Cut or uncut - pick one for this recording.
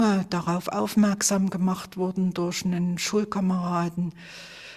uncut